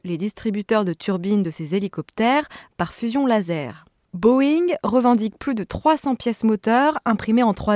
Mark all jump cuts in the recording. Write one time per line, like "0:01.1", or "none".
none